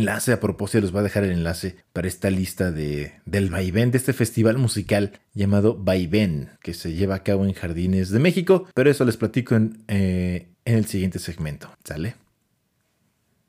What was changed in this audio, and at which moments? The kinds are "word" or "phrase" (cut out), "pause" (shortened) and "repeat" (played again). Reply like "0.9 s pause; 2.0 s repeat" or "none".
1.8 s pause; 5.2 s pause; 6.6 s pause; 8.7 s pause; 10.5 s pause; 11.7 s pause